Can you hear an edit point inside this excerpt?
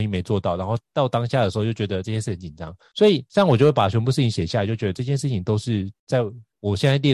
no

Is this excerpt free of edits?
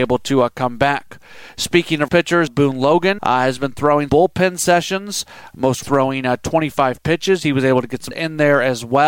no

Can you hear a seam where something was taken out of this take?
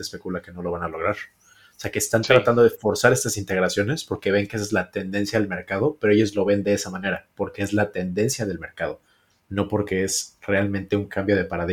no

